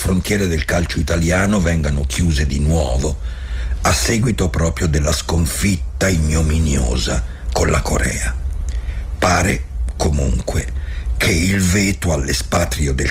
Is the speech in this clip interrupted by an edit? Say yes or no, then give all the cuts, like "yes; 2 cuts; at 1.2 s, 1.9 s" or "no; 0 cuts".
no; 0 cuts